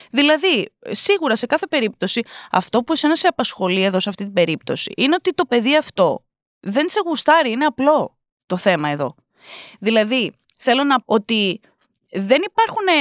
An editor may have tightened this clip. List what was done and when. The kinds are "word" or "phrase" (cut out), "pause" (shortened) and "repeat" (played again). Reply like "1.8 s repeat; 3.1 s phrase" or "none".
11.0 s word

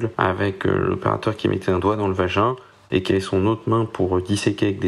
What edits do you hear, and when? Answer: none

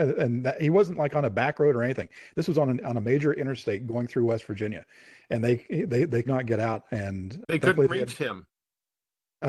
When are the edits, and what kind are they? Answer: 6.2 s word; 7.4 s word

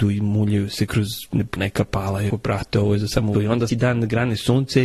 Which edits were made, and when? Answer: 1.6 s word; 2.3 s word; 3.3 s word; 3.7 s word

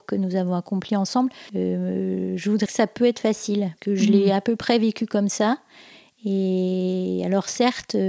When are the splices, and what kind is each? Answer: 2.7 s word; 3.8 s word

